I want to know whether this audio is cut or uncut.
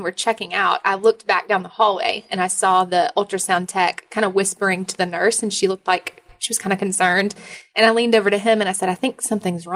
uncut